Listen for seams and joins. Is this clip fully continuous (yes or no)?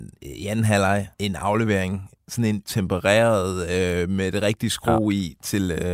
no